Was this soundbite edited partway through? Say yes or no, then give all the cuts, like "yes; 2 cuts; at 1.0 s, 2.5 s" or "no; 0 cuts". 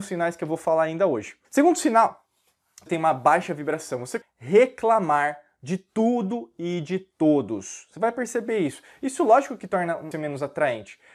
yes; 4 cuts; at 1.4 s, 2.9 s, 4.2 s, 10.1 s